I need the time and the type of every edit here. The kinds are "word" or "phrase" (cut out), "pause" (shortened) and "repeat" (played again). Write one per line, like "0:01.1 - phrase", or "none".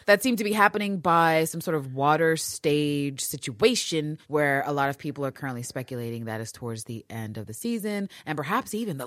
none